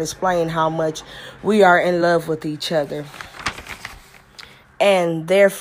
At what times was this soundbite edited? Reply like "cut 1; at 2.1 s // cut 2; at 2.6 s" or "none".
none